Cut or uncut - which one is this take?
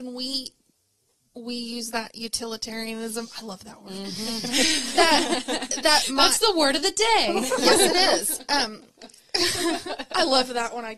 uncut